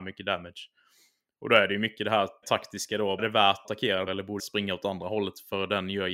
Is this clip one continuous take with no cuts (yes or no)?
no